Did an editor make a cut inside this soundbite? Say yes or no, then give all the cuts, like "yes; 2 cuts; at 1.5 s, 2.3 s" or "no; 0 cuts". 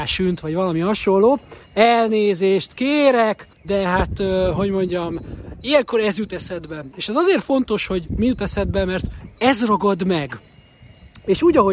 yes; 2 cuts; at 1.6 s, 3.5 s